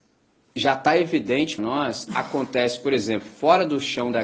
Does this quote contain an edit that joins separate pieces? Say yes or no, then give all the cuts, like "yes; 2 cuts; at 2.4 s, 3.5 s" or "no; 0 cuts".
yes; 2 cuts; at 1.6 s, 2.1 s